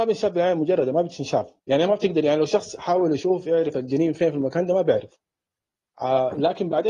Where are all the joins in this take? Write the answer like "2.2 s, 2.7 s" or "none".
1.6 s